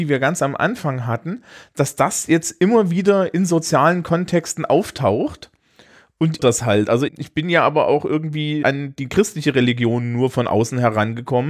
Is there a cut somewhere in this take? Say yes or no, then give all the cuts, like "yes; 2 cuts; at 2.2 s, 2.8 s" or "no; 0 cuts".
yes; 3 cuts; at 6.4 s, 7.1 s, 8.6 s